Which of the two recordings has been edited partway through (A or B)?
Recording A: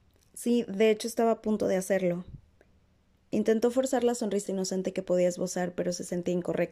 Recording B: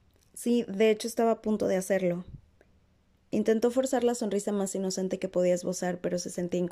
A